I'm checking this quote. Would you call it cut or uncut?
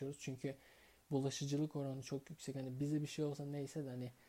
uncut